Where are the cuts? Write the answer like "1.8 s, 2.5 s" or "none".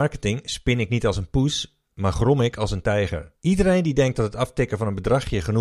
3.4 s